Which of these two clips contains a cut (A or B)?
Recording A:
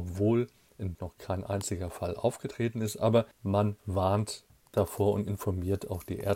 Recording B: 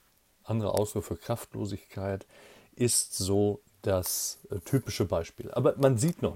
A